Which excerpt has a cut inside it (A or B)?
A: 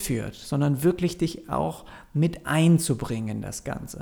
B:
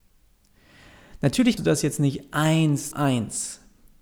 B